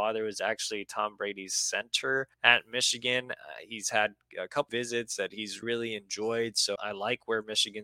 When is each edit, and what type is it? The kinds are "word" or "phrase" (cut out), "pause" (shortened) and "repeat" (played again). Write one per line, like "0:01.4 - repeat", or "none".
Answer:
0:02.3 - pause
0:04.7 - word
0:05.6 - word
0:06.8 - word